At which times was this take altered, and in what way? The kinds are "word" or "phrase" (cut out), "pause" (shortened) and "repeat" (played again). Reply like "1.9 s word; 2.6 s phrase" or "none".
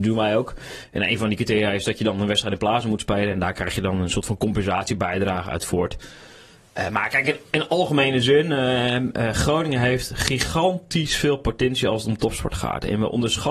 none

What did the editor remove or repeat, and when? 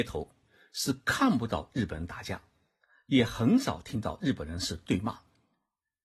none

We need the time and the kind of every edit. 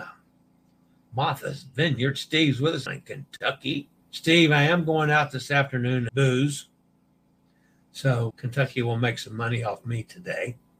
2.9 s word; 4.0 s pause; 6.1 s phrase; 8.3 s word

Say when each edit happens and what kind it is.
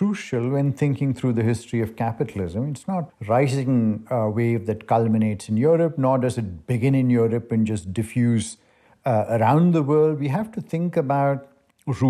3.1 s word

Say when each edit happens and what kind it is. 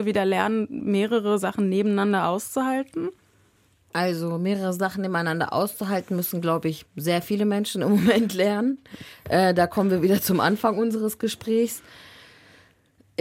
none

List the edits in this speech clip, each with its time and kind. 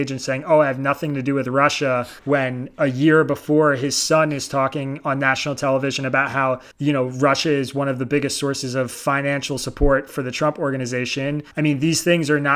2.2 s pause; 6.7 s pause; 11.5 s pause

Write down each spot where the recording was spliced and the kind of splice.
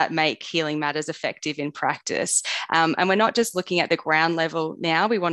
none

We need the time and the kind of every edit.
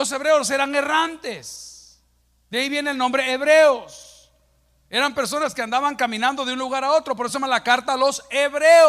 none

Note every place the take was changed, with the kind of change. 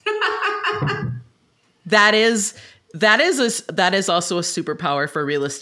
none

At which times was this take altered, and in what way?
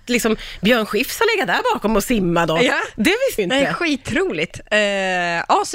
3.4 s word

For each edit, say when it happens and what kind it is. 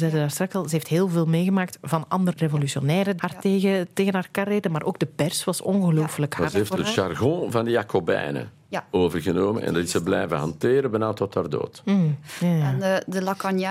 2.3 s word; 3.2 s word

